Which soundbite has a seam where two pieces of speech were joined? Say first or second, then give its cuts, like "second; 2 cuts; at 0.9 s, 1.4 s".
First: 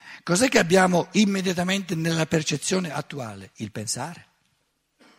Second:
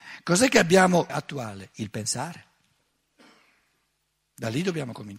second; 1 cut; at 1.1 s